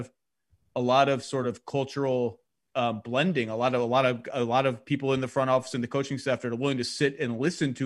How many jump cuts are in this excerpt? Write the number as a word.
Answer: zero